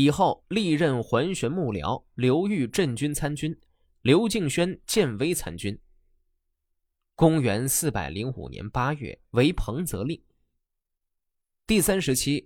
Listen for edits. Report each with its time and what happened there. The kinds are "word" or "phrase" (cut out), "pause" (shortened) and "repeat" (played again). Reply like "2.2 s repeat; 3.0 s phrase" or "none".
9.2 s pause